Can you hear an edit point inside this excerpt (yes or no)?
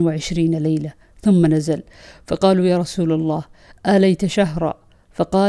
no